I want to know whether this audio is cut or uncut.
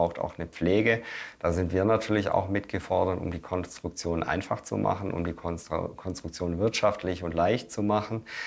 uncut